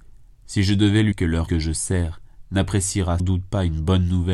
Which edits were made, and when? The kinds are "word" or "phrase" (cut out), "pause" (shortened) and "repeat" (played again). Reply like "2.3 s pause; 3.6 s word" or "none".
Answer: 1.1 s word; 1.5 s word; 3.2 s word